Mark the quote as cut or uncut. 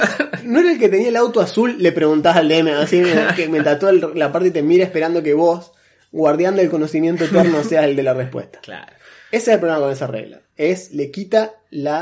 uncut